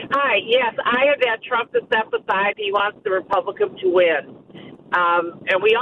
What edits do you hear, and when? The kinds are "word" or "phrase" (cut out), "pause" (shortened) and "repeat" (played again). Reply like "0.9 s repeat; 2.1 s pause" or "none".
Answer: 1.2 s word; 1.7 s word; 2.5 s word; 3.7 s word